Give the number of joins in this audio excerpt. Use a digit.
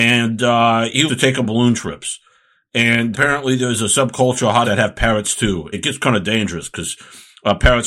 5